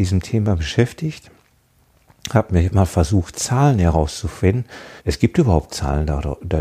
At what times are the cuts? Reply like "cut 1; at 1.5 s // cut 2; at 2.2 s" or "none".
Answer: cut 1; at 2.7 s // cut 2; at 5.0 s // cut 3; at 5.7 s